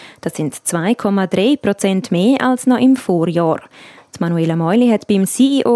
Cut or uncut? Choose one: uncut